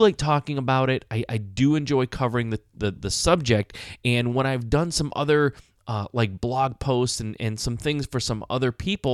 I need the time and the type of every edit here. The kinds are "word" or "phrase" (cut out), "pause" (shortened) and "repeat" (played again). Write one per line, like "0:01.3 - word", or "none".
none